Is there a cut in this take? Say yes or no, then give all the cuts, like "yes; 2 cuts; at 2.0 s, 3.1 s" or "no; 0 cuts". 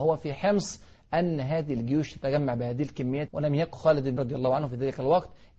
yes; 3 cuts; at 3.3 s, 3.7 s, 4.2 s